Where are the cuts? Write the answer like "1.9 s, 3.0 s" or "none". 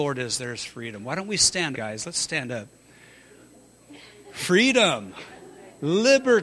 1.7 s